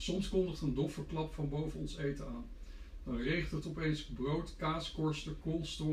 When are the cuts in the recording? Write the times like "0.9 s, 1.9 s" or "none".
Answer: none